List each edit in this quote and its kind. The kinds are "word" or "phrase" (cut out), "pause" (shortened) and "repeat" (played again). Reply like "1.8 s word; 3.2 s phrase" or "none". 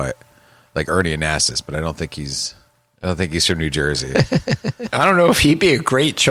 none